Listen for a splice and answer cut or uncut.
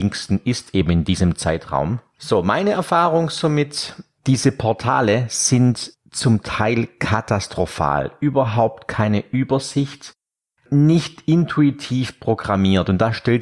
uncut